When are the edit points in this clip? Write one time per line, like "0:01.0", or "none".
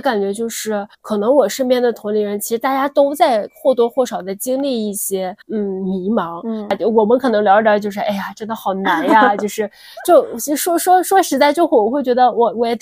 0:00.9
0:05.4